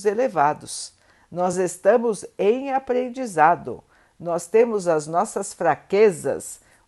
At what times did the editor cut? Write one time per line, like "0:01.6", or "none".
none